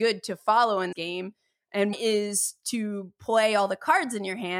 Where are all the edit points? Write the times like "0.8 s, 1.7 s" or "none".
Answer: 0.9 s, 1.9 s

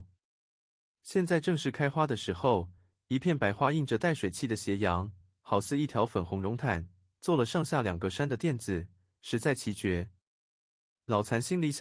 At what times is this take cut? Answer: none

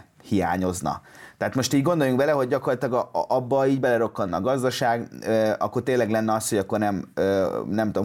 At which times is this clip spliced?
none

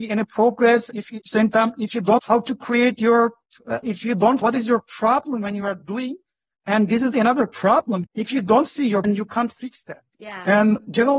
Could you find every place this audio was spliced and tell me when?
0.9 s, 1.2 s, 2.2 s, 3.8 s, 4.4 s, 8.0 s, 9.0 s

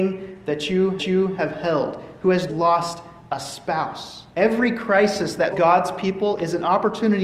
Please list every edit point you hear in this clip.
1.0 s, 2.5 s, 4.3 s, 5.5 s

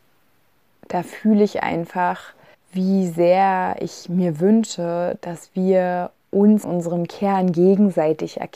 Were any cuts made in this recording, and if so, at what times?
2.5 s, 6.6 s

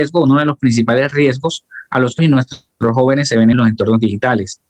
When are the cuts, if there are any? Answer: 2.2 s, 3.5 s

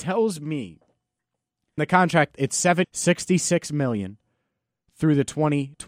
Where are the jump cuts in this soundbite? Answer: 1.8 s, 2.8 s

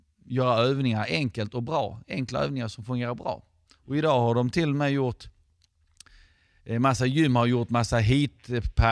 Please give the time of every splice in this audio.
none

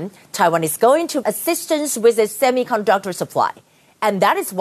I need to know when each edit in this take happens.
1.2 s

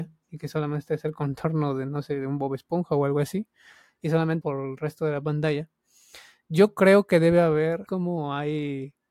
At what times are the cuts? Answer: 4.4 s, 7.9 s

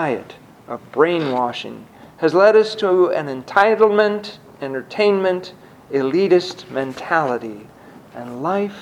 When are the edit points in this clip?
none

